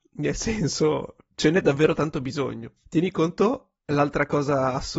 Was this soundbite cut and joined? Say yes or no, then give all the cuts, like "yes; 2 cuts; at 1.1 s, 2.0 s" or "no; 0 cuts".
no; 0 cuts